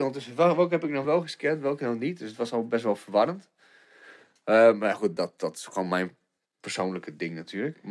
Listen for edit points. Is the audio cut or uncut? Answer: uncut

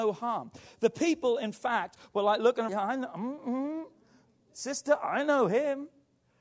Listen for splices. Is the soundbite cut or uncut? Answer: cut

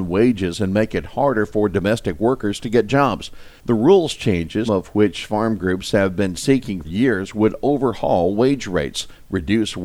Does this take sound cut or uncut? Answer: cut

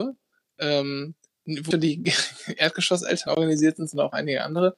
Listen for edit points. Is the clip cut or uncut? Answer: cut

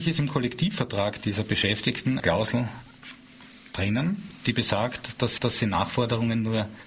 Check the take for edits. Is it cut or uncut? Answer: cut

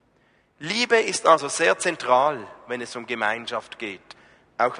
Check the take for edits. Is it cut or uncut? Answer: uncut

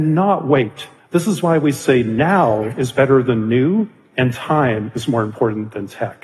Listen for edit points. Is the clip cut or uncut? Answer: cut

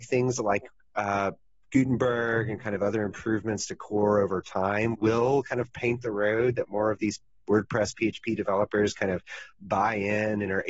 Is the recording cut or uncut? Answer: cut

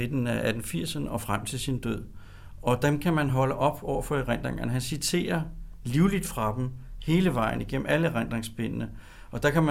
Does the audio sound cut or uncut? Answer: uncut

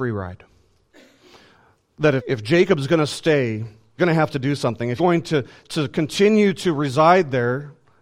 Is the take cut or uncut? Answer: cut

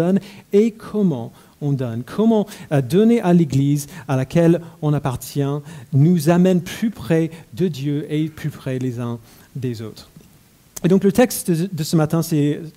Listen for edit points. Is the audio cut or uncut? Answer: uncut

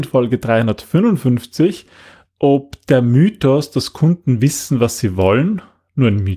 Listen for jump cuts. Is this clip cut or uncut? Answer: uncut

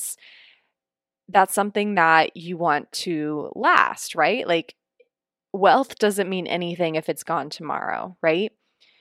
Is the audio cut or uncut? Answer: uncut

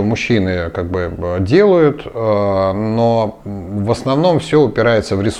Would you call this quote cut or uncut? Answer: uncut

